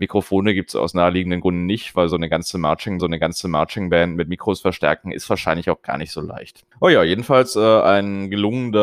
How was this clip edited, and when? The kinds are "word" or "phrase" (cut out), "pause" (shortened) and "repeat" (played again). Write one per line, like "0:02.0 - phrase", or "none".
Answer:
0:03.0 - repeat
0:06.7 - pause